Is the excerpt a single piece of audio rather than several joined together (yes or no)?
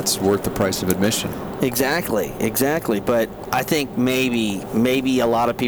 yes